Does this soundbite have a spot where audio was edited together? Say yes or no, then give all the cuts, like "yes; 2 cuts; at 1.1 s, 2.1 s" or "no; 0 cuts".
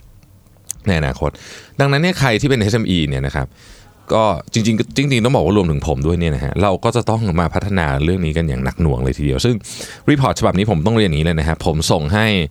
no; 0 cuts